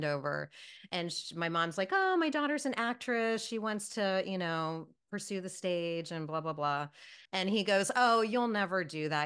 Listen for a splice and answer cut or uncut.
cut